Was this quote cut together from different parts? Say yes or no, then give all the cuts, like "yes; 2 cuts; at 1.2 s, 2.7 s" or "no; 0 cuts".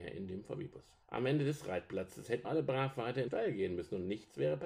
yes; 3 cuts; at 1.0 s, 2.4 s, 3.3 s